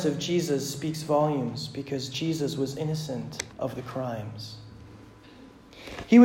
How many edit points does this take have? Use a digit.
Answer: 1